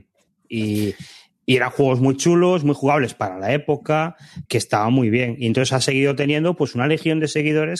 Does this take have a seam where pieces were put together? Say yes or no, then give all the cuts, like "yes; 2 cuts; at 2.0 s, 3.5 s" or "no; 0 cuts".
yes; 1 cut; at 4.5 s